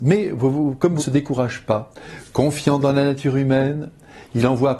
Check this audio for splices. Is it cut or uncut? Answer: cut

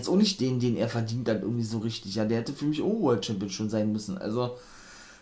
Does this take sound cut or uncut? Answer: uncut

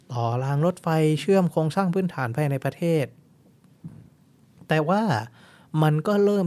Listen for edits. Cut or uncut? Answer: cut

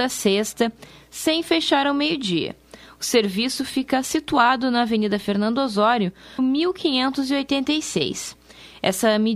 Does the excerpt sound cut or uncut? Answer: cut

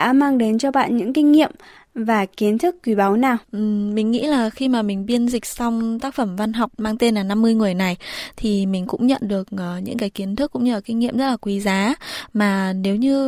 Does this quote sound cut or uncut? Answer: cut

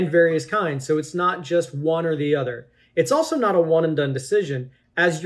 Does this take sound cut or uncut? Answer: uncut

